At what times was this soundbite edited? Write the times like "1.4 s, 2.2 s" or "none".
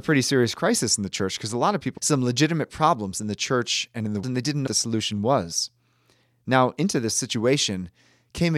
2.0 s, 4.2 s, 4.7 s